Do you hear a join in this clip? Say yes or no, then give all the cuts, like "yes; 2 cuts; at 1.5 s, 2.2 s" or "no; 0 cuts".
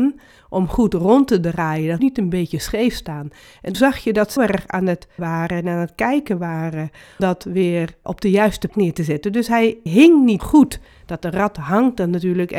yes; 9 cuts; at 2.0 s, 3.7 s, 4.4 s, 5.2 s, 7.2 s, 8.0 s, 8.7 s, 9.9 s, 10.4 s